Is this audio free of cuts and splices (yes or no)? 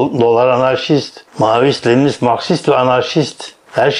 no